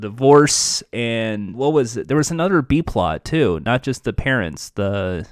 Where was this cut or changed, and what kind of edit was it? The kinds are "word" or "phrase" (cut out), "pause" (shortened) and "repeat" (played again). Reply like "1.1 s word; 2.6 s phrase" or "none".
1.5 s word